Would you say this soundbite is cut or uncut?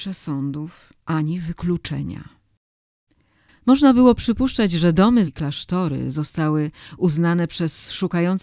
cut